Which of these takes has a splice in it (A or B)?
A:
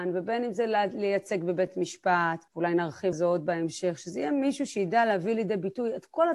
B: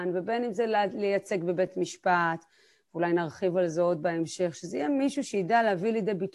A